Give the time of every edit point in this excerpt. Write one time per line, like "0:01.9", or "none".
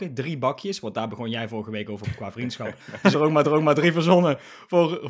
0:03.1
0:03.4